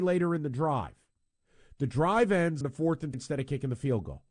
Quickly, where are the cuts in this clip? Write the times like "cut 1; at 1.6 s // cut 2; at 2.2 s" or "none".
cut 1; at 2.6 s // cut 2; at 3.1 s